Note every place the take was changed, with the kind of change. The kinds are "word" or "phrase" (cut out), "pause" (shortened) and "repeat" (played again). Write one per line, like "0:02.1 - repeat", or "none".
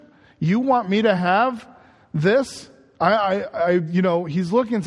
none

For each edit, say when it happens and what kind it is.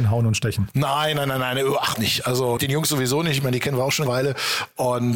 0:01.9 - word
0:02.6 - word
0:04.1 - word

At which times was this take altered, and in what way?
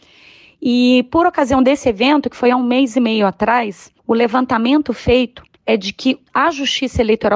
0:04.0 - pause
0:05.5 - pause
0:06.3 - pause

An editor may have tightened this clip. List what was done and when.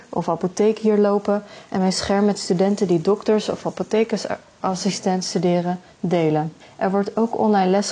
0:06.6 - pause

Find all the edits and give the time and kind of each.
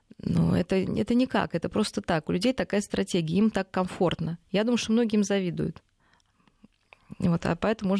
none

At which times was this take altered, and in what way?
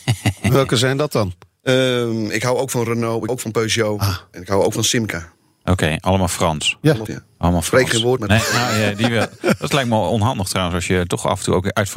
0:03.3 - word
0:07.1 - word
0:08.2 - word

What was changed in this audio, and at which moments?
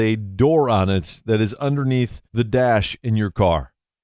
0:02.3 - pause

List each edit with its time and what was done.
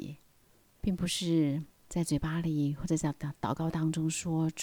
0:01.7 - pause

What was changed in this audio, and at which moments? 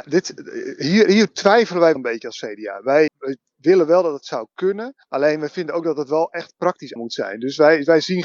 0:02.0 - word
0:03.1 - word
0:05.0 - pause
0:07.0 - word

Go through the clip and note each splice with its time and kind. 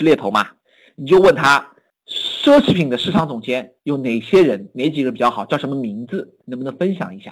0:01.9 - pause
0:06.4 - pause

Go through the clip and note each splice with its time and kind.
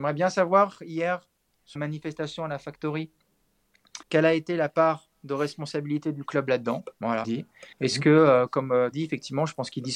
0:01.8 - phrase
0:04.0 - pause
0:05.1 - pause
0:07.2 - phrase
0:07.7 - pause
0:08.9 - phrase

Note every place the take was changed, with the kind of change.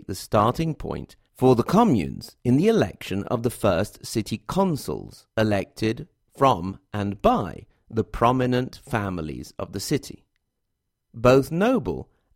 0:05.3 - pause

